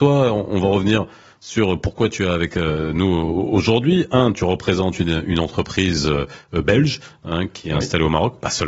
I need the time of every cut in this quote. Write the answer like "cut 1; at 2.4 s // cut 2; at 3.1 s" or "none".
none

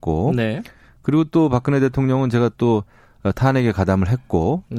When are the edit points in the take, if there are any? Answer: none

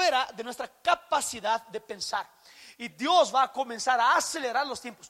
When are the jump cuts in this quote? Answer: none

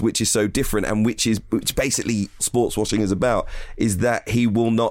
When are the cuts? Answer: cut 1; at 2.4 s

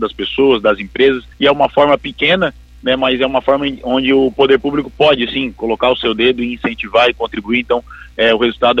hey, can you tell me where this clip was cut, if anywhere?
cut 1; at 1.3 s

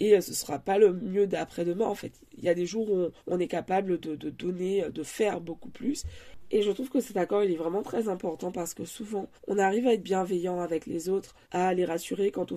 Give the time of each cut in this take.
cut 1; at 3.2 s // cut 2; at 9.4 s // cut 3; at 11.4 s

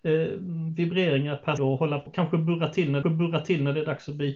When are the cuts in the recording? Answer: cut 1; at 1.6 s // cut 2; at 2.1 s // cut 3; at 3.0 s

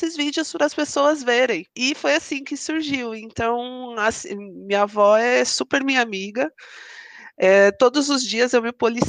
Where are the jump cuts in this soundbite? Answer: cut 1; at 1.7 s

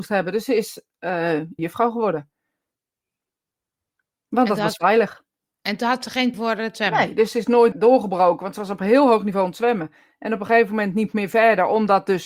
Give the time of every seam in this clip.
cut 1; at 1.6 s // cut 2; at 6.3 s // cut 3; at 7.7 s

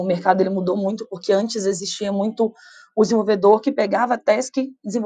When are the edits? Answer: none

